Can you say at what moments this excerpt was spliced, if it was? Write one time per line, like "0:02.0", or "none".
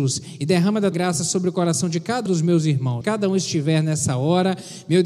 0:00.9
0:02.3
0:03.0